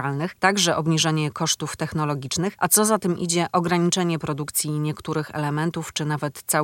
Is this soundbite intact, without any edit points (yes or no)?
yes